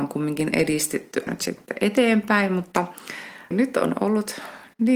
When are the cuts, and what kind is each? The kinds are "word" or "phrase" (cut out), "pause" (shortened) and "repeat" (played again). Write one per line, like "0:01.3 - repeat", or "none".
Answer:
0:01.3 - word
0:03.5 - word